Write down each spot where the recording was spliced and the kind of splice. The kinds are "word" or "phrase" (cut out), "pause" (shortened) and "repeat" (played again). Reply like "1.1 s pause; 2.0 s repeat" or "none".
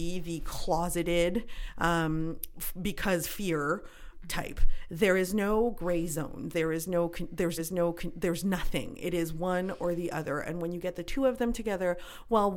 7.6 s repeat